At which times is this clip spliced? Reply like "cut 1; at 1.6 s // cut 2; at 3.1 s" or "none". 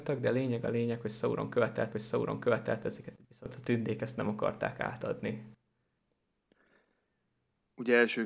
cut 1; at 1.9 s // cut 2; at 3.2 s